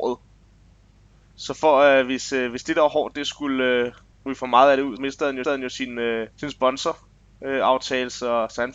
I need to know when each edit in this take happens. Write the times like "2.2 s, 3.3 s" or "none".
4.1 s, 5.0 s, 5.4 s, 6.3 s